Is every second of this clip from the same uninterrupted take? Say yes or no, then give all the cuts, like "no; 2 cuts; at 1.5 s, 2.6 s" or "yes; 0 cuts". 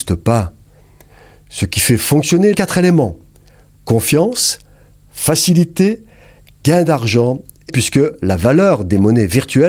no; 2 cuts; at 2.5 s, 7.7 s